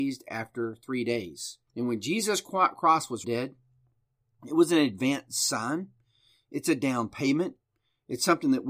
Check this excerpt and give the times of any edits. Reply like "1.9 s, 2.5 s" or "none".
1.7 s, 3.2 s